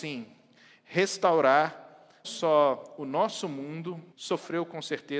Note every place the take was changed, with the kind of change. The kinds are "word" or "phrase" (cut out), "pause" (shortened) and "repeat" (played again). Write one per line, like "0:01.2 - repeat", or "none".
0:02.2 - word
0:04.1 - word